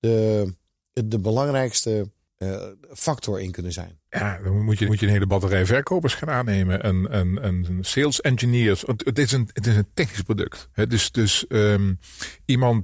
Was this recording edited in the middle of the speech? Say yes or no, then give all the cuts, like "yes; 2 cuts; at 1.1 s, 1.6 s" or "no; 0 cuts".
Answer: yes; 3 cuts; at 4.1 s, 4.9 s, 10.7 s